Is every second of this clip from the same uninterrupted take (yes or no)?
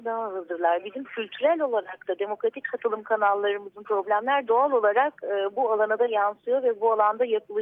no